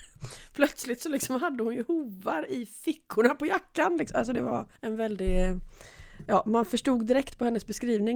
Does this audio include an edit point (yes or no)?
yes